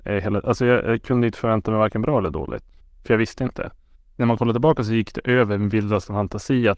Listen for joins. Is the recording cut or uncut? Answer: cut